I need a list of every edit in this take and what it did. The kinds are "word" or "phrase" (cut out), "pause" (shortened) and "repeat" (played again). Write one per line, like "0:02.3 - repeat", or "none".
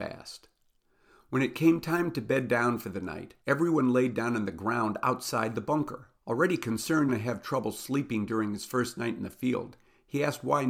0:03.4 - pause
0:06.2 - pause
0:07.1 - phrase